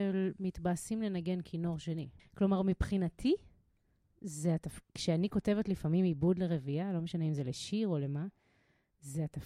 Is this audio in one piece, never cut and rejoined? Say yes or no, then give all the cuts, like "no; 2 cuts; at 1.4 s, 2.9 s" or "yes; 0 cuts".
no; 1 cut; at 2.2 s